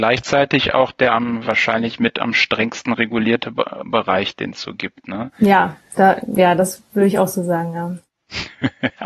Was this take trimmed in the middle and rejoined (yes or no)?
no